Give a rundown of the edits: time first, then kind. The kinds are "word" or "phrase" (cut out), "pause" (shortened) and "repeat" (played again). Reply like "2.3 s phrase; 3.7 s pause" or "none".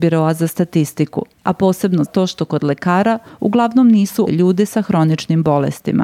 1.4 s pause; 2.1 s word; 4.3 s word

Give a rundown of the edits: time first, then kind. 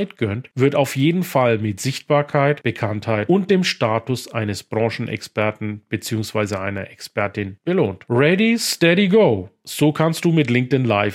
none

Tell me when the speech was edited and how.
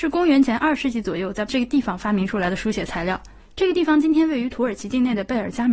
1.5 s word; 3.4 s pause

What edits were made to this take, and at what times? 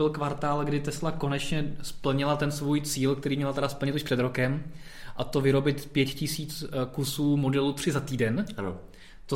none

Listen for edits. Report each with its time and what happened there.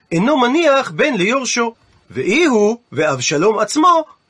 none

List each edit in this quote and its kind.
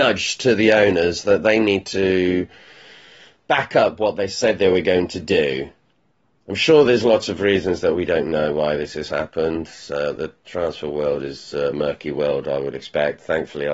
11.7 s word

